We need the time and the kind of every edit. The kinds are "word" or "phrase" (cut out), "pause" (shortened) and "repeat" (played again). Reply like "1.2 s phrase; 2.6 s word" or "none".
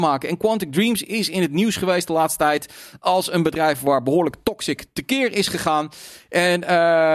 none